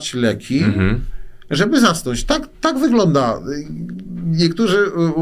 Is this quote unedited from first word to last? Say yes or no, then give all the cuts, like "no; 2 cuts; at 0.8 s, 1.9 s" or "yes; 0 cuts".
no; 1 cut; at 2.5 s